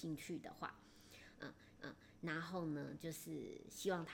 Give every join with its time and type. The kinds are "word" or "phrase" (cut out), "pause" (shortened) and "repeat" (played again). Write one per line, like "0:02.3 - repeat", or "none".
0:01.8 - repeat